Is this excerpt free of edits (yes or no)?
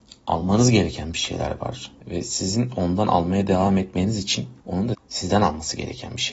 no